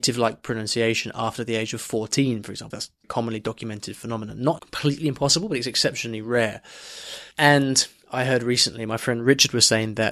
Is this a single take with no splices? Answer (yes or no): no